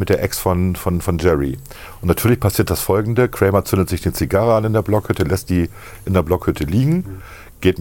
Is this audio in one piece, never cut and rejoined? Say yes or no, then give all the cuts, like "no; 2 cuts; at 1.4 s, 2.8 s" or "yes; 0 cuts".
yes; 0 cuts